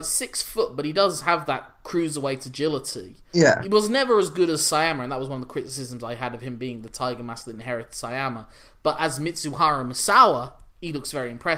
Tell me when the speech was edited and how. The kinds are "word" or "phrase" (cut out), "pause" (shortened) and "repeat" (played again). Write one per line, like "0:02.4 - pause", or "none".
none